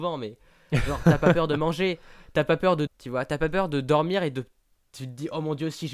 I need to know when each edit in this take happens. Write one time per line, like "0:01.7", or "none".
0:02.9